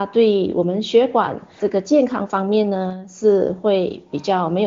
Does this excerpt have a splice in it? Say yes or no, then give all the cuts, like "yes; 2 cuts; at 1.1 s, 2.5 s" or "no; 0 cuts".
yes; 1 cut; at 1.6 s